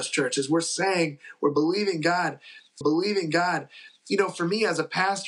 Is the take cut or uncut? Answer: cut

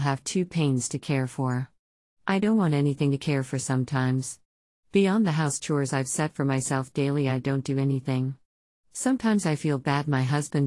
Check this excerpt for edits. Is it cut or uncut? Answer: uncut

